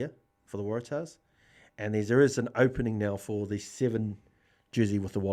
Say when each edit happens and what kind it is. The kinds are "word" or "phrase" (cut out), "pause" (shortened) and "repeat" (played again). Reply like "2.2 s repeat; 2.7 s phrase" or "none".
none